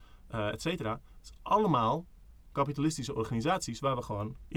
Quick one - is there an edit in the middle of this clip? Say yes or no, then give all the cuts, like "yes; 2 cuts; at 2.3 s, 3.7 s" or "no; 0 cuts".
no; 0 cuts